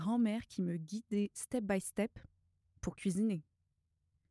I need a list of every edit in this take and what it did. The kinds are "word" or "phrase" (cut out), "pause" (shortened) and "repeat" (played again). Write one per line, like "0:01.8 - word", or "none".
0:02.6 - pause